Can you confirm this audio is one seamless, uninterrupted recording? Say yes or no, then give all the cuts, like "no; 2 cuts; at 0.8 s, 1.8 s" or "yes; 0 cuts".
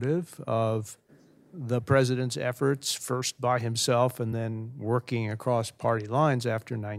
yes; 0 cuts